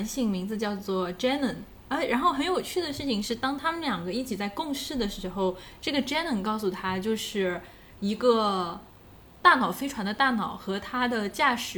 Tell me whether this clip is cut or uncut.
uncut